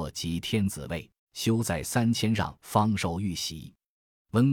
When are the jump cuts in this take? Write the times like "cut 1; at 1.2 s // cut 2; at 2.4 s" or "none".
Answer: cut 1; at 1.2 s // cut 2; at 2.6 s